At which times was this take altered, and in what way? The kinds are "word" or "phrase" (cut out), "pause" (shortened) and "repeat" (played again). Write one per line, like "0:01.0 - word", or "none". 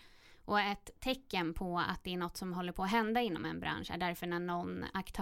none